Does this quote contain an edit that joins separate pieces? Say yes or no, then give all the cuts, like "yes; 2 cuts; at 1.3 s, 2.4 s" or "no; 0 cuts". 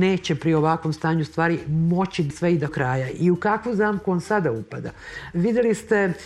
yes; 2 cuts; at 2.3 s, 2.7 s